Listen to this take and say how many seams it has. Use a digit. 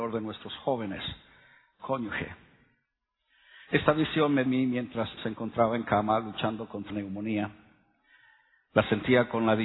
4